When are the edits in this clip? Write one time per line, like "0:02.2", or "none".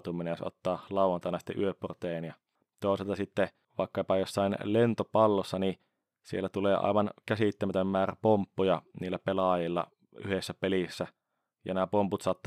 none